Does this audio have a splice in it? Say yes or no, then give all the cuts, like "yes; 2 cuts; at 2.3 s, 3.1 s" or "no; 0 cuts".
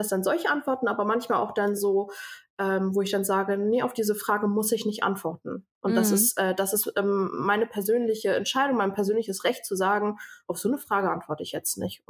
no; 0 cuts